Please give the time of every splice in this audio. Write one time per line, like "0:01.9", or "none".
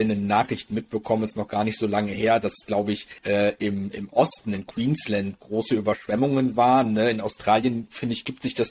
0:03.2